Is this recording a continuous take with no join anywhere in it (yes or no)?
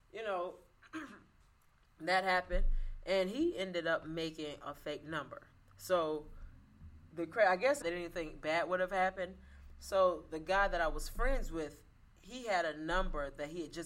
no